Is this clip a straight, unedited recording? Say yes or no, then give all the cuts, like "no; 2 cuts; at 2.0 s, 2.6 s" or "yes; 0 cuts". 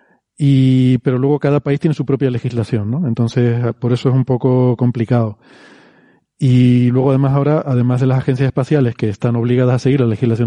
yes; 0 cuts